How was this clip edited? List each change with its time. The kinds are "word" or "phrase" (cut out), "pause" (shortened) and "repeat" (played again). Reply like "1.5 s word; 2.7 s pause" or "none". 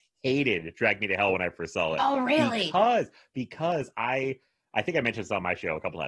none